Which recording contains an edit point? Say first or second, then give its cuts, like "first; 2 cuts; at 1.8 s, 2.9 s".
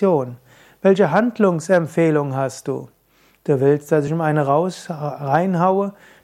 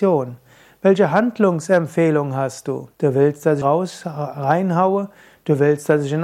second; 2 cuts; at 2.9 s, 3.6 s